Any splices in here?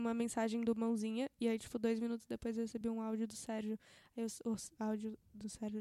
no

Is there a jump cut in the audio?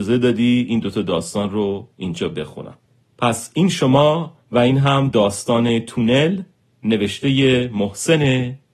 yes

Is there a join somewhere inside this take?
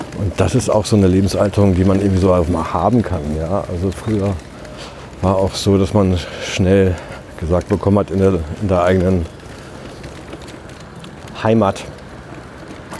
no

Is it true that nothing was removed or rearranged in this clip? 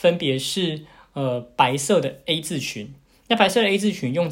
yes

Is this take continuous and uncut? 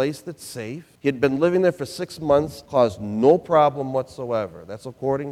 no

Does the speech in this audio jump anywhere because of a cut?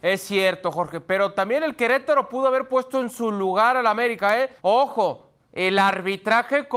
yes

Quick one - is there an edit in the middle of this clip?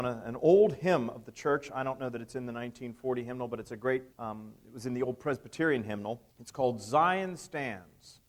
yes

